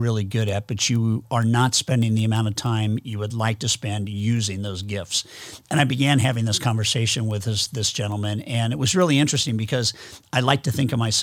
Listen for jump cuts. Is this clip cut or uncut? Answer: uncut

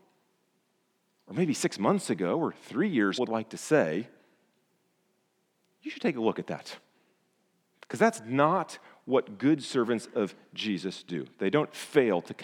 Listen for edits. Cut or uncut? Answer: cut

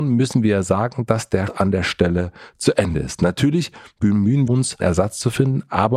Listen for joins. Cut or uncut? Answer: cut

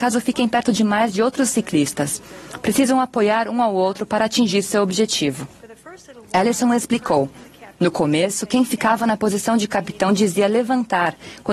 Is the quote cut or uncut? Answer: uncut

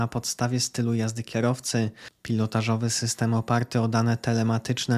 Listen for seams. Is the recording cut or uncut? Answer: uncut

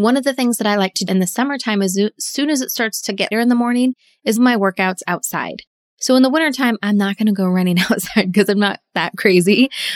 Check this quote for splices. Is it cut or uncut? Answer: cut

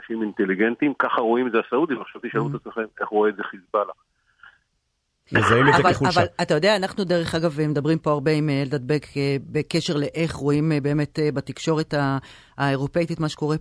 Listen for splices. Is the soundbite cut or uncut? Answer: uncut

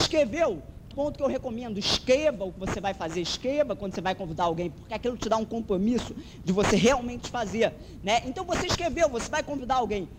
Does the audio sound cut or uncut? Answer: cut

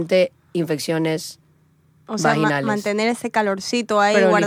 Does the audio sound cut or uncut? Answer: uncut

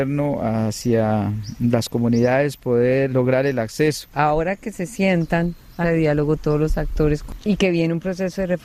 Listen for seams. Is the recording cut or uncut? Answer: cut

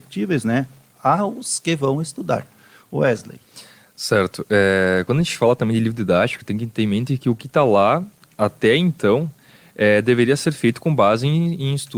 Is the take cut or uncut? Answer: uncut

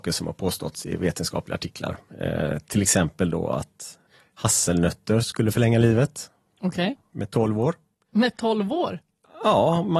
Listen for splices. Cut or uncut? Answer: uncut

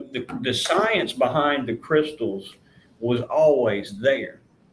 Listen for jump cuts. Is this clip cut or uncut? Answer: uncut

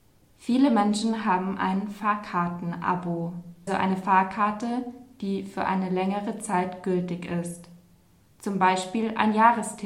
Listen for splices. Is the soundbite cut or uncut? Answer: cut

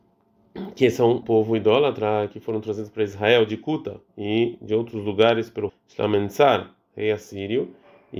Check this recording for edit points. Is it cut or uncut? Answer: cut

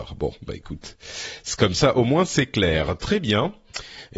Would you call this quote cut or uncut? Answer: uncut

